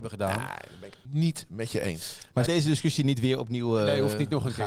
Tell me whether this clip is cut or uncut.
cut